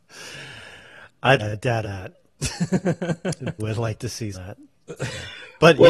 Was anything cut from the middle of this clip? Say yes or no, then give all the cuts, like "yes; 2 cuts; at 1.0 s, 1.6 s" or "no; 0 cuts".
yes; 4 cuts; at 1.4 s, 1.8 s, 3.6 s, 4.3 s